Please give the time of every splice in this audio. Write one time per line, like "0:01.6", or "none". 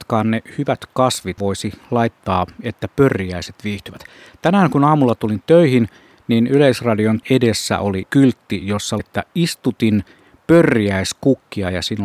0:01.4
0:07.2
0:08.0
0:09.0